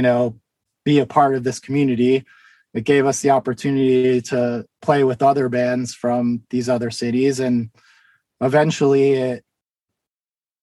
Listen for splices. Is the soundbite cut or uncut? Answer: uncut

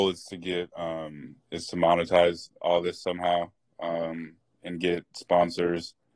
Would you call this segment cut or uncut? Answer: uncut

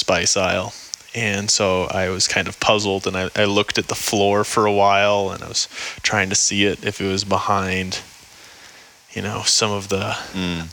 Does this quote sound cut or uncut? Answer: uncut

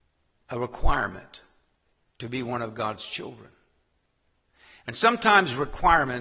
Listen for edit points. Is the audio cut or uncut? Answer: uncut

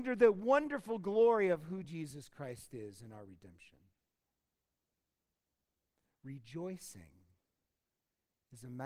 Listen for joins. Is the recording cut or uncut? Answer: uncut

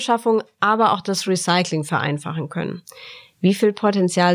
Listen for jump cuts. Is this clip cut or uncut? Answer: uncut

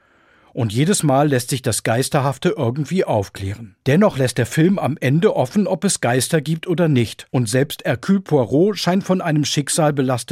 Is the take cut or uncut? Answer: cut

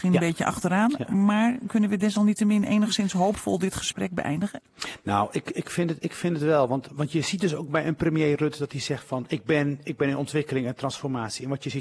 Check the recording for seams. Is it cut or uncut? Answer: cut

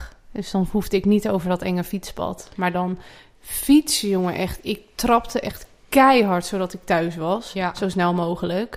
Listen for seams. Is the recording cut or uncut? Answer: uncut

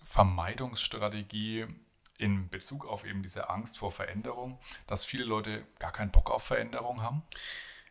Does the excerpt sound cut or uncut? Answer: uncut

